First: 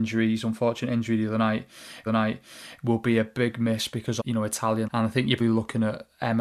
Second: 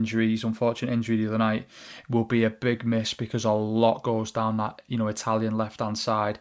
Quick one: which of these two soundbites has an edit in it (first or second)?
first